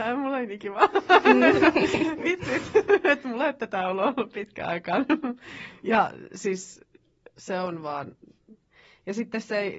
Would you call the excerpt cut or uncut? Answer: uncut